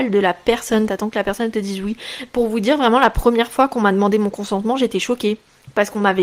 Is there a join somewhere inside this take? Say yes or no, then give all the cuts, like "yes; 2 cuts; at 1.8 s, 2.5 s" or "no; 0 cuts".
no; 0 cuts